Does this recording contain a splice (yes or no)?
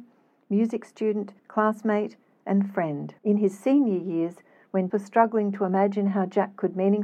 yes